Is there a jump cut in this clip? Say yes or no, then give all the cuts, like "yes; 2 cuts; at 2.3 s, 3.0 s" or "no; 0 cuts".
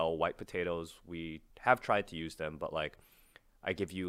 yes; 1 cut; at 1.5 s